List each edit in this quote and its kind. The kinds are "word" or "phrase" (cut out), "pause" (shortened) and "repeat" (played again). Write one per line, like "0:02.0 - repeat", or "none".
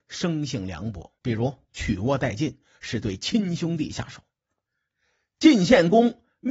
0:01.2 - pause